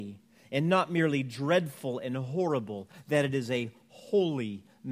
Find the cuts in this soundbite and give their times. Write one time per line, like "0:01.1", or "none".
none